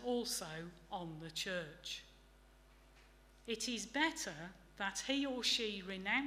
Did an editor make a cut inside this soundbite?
no; 0 cuts

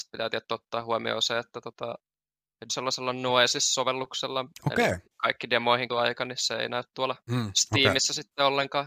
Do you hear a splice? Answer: yes; 4 cuts; at 2.7 s, 5.1 s, 5.9 s, 7.2 s

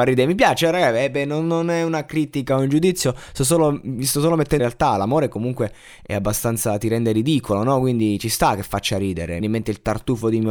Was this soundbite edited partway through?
yes; 2 cuts; at 4.6 s, 9.4 s

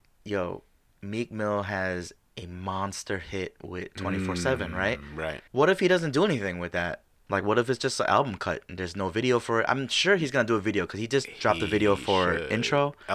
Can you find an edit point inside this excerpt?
yes; 1 cut; at 5.5 s

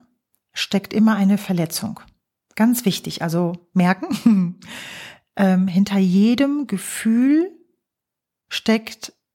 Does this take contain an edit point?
no; 0 cuts

